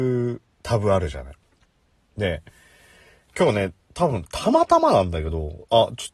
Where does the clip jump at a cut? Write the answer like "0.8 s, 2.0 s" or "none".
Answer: none